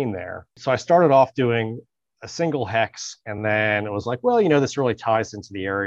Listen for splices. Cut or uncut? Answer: uncut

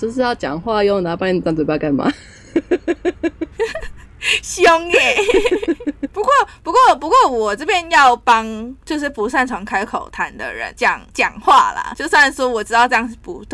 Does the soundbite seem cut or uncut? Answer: uncut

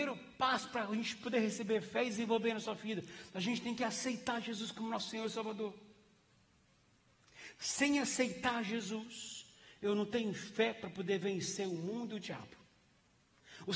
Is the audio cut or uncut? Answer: uncut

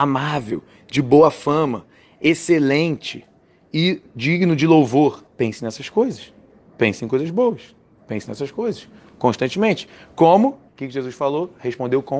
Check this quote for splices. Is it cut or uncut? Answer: cut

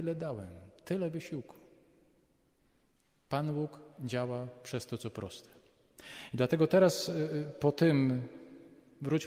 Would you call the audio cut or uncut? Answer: uncut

